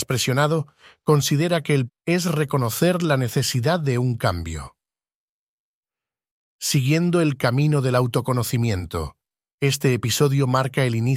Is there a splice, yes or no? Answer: yes